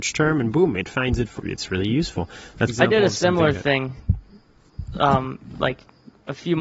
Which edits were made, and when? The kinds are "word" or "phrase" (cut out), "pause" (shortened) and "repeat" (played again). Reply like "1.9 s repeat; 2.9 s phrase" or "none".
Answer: 1.4 s phrase; 2.7 s phrase